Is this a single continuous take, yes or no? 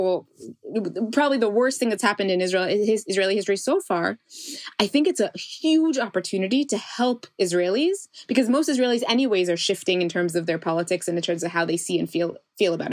yes